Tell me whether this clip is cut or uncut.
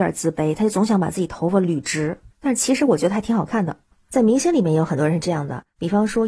uncut